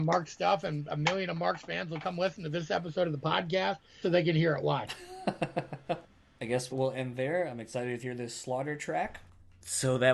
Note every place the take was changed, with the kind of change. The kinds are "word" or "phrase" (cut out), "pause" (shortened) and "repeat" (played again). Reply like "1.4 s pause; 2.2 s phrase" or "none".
4.0 s word; 6.7 s word; 8.0 s word